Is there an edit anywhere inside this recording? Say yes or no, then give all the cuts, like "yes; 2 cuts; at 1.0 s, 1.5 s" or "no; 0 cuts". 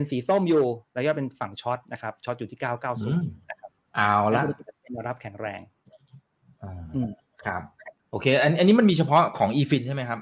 yes; 1 cut; at 8.0 s